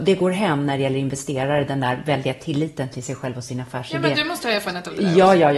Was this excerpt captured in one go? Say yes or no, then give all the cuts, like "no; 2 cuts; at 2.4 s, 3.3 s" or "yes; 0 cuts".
yes; 0 cuts